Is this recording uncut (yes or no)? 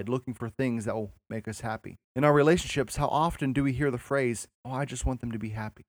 no